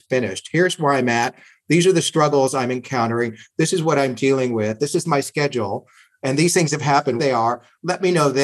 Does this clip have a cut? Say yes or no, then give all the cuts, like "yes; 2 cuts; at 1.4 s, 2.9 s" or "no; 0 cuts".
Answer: yes; 1 cut; at 7.2 s